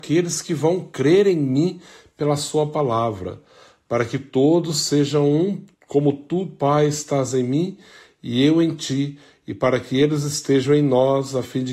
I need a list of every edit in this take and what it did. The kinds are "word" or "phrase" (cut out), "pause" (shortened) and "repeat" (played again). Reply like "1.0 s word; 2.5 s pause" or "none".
5.7 s pause